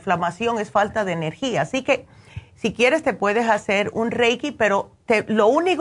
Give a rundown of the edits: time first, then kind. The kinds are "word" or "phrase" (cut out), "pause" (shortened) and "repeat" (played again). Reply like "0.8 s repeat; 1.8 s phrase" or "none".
none